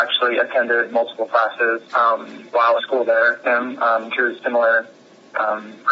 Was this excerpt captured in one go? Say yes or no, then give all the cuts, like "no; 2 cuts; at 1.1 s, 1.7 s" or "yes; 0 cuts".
no; 4 cuts; at 1.9 s, 2.8 s, 3.4 s, 4.1 s